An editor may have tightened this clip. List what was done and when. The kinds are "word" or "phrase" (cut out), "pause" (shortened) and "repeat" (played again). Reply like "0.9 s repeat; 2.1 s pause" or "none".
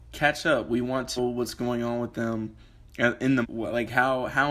1.2 s word; 3.4 s word